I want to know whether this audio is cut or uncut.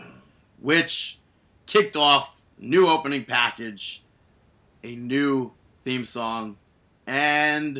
uncut